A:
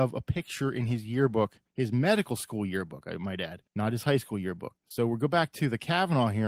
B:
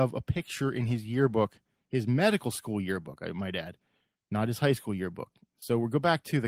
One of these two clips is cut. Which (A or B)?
A